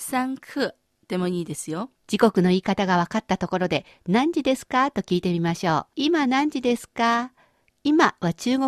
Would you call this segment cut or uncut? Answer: cut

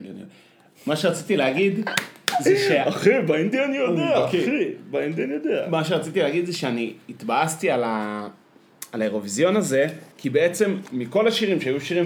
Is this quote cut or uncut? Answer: cut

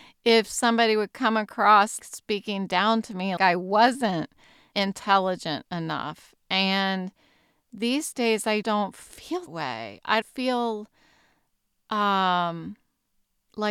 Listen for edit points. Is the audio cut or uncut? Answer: cut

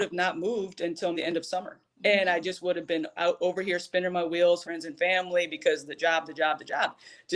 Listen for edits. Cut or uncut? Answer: cut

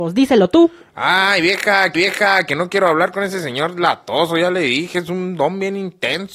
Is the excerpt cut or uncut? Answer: cut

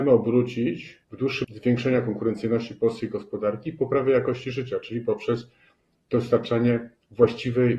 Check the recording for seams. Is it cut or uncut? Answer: cut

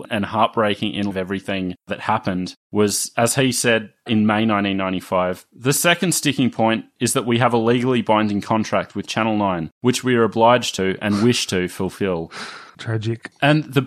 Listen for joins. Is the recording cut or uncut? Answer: cut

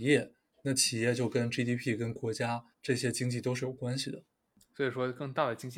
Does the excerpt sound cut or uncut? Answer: cut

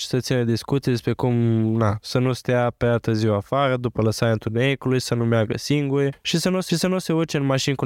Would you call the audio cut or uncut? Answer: cut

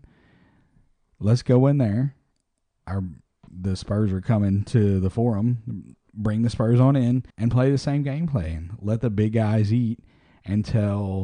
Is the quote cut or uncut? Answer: cut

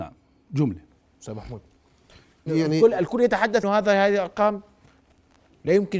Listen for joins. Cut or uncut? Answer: cut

